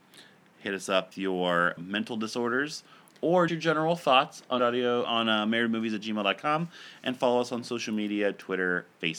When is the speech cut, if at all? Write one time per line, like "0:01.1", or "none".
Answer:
0:01.1
0:01.8
0:03.5
0:04.6
0:05.0